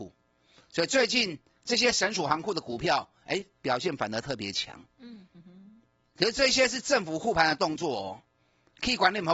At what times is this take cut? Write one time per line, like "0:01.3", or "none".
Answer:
none